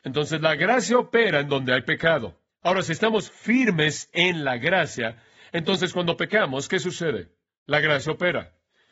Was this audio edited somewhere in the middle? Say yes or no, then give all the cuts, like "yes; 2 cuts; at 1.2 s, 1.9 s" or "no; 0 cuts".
no; 0 cuts